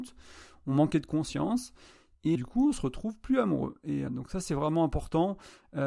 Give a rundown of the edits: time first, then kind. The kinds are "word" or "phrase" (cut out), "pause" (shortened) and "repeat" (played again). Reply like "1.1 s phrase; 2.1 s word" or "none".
2.3 s word; 4.1 s word

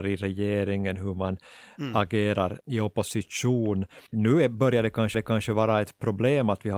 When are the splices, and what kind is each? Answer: 2.6 s word; 4.1 s pause; 5.1 s repeat

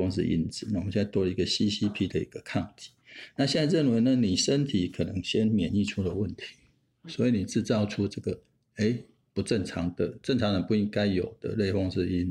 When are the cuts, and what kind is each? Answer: none

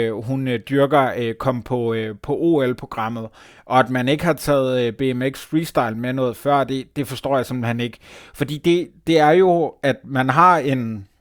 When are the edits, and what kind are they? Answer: none

